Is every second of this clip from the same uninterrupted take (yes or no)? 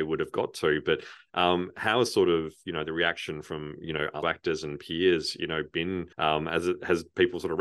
no